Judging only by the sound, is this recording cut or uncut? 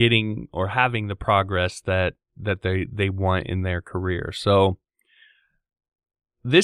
uncut